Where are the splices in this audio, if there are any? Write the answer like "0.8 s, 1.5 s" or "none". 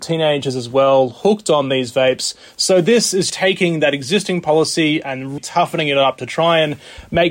3.3 s, 5.4 s